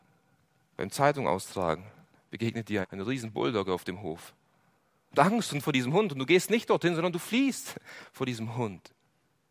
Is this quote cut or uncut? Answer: cut